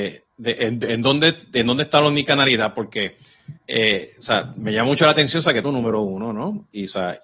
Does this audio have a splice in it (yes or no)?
yes